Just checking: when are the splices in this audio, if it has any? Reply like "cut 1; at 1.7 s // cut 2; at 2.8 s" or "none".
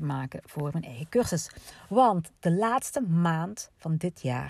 cut 1; at 2.4 s